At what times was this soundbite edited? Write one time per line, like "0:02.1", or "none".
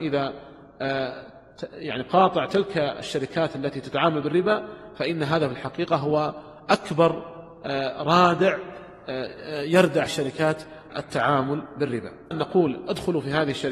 0:10.1
0:10.9
0:12.3